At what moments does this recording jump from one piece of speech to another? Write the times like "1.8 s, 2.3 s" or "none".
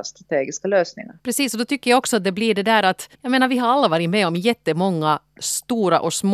1.2 s, 3.1 s